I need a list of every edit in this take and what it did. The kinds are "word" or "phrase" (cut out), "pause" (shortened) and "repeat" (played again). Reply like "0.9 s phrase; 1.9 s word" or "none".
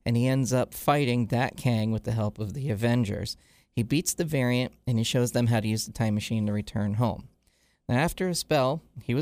none